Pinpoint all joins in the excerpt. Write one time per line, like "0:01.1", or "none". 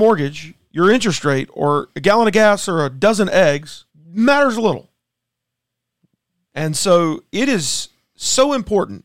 0:03.9